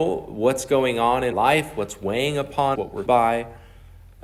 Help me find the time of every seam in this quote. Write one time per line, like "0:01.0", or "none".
0:01.3
0:02.7
0:03.1